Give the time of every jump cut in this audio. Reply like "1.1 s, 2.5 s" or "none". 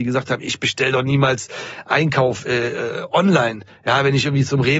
none